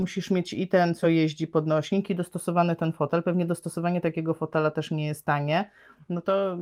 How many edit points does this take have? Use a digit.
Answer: 0